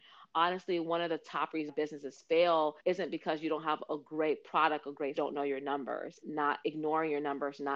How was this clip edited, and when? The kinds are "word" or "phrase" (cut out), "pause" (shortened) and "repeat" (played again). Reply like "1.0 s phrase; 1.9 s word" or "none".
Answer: 1.7 s word; 2.8 s pause; 5.2 s phrase; 6.2 s word; 6.6 s word